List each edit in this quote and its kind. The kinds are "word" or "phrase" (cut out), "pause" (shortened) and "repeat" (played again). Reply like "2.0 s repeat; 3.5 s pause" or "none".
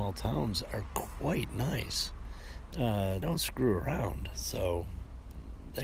3.2 s word